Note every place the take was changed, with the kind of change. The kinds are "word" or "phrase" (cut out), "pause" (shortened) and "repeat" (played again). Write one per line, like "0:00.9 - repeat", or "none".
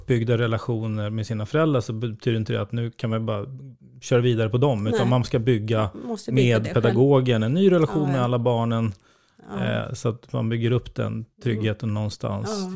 0:11.3 - pause